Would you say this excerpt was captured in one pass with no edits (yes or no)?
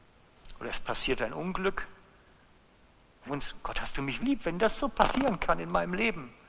no